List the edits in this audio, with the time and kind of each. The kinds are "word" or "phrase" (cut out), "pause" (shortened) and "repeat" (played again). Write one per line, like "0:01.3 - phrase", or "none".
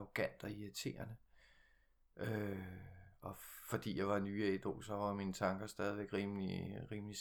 none